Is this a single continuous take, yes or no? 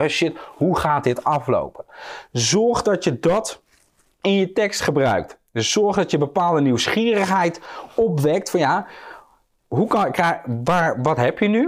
yes